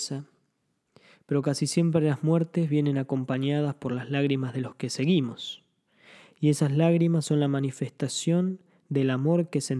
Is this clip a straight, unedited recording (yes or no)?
yes